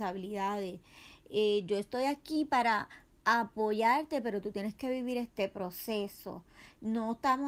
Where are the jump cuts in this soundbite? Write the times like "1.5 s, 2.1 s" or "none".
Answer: none